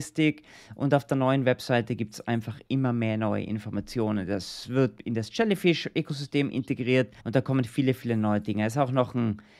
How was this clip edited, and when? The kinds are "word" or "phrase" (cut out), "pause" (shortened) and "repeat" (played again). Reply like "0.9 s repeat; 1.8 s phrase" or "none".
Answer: 7.2 s pause